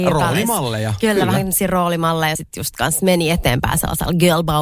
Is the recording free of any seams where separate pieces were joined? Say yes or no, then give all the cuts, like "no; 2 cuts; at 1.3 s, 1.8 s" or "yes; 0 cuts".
no; 1 cut; at 2.4 s